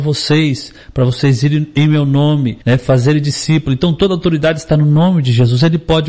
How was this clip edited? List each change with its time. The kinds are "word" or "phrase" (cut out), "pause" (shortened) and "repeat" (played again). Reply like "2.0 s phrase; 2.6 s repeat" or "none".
2.6 s pause